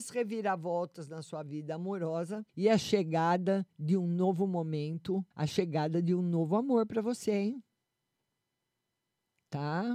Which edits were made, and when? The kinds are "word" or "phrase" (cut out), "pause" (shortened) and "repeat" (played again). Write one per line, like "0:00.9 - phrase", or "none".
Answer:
0:02.5 - pause
0:05.3 - pause